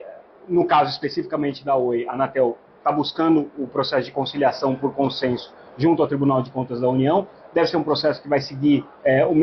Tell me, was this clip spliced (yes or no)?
no